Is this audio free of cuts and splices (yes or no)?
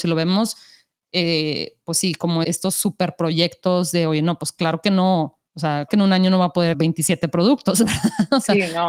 no